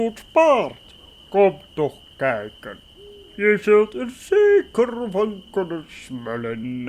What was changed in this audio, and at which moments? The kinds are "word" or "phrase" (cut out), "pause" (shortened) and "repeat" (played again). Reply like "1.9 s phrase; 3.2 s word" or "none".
none